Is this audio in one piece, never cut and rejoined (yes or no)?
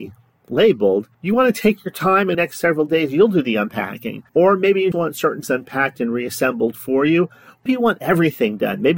no